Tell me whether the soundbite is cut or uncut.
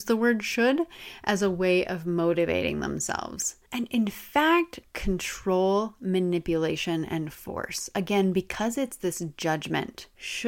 cut